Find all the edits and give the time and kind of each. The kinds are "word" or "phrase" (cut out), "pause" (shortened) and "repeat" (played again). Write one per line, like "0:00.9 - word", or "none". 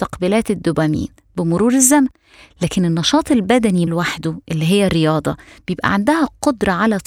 0:03.9 - word

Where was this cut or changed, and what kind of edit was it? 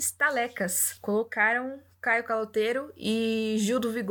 none

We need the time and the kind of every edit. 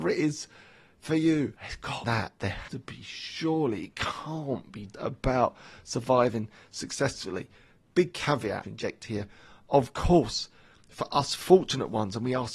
0:01.6 - pause
0:02.0 - phrase
0:02.7 - word
0:04.9 - word
0:08.6 - phrase

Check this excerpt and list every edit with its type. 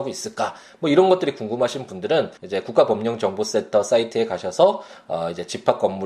0:02.4 - pause

